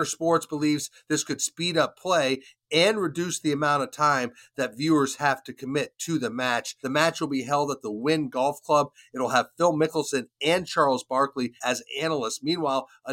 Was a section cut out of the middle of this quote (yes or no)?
no